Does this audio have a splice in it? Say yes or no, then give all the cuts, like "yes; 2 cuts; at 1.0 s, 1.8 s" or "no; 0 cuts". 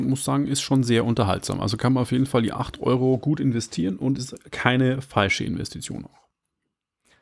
no; 0 cuts